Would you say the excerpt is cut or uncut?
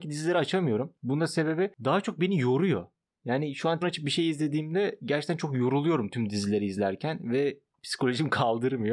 cut